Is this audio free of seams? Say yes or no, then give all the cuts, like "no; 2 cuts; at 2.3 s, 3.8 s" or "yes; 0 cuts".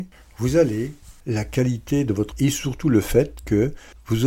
no; 2 cuts; at 1.2 s, 2.3 s